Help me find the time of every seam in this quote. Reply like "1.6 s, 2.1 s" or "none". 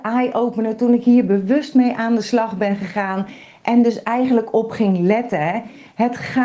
none